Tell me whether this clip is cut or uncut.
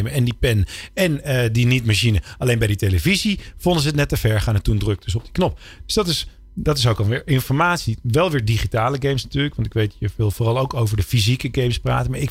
uncut